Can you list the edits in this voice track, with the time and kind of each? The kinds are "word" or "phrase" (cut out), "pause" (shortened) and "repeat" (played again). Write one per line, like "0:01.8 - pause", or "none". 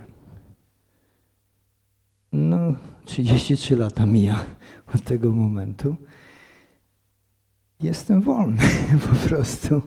none